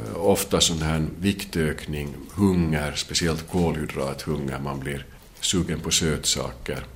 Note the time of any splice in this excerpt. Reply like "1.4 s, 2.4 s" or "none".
none